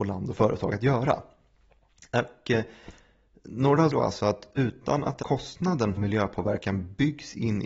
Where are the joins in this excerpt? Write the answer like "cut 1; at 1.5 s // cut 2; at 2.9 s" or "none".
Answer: cut 1; at 3.9 s // cut 2; at 5.2 s // cut 3; at 6.0 s